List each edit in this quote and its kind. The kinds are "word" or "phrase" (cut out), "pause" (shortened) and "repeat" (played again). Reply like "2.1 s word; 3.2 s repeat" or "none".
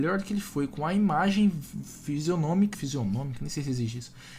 2.7 s word